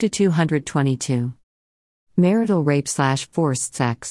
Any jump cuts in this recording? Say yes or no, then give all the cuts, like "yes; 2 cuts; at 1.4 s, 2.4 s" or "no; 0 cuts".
no; 0 cuts